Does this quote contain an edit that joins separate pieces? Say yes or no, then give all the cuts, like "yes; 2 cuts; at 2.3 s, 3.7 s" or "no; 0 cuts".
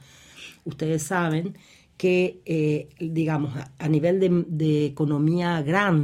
no; 0 cuts